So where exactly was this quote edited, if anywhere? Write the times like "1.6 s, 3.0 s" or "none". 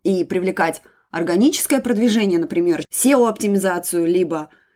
2.8 s